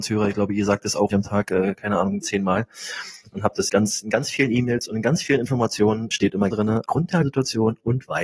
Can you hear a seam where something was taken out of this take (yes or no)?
yes